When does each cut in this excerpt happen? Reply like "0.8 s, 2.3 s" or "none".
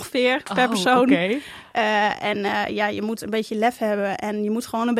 none